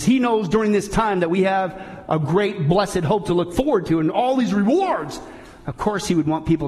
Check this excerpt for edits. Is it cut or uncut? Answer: uncut